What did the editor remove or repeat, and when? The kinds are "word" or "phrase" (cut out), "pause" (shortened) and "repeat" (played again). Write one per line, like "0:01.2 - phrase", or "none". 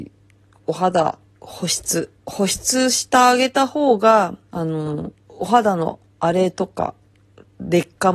0:02.2 - pause
0:04.4 - pause
0:05.2 - pause

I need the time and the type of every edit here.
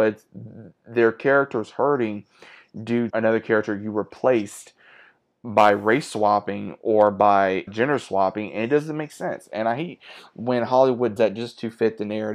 0:03.1 - word
0:07.7 - word
0:11.2 - word

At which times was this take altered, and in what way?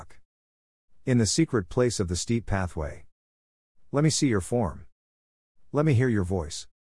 none

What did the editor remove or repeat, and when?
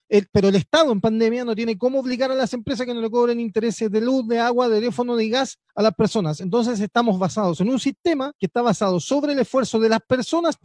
0:05.7 - pause
0:08.4 - pause

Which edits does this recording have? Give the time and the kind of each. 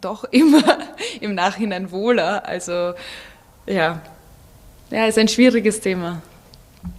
none

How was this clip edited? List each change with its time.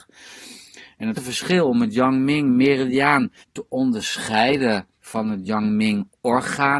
0:01.1 - word
0:03.4 - word
0:04.9 - pause

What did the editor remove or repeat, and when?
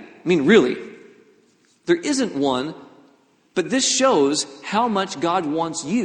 none

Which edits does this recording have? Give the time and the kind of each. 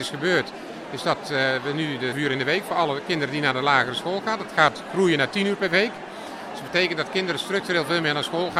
0:02.1 - phrase

